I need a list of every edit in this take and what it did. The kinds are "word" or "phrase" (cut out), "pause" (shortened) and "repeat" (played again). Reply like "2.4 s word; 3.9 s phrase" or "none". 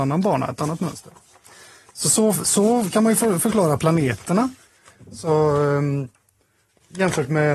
none